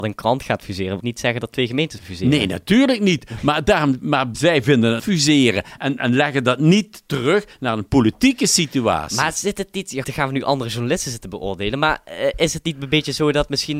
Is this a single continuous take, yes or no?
no